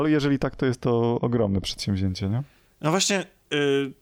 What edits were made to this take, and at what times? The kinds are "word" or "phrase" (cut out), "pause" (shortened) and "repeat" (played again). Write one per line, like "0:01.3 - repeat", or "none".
none